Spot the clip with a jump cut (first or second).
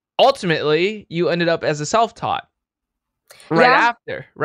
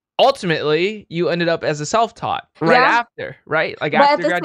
second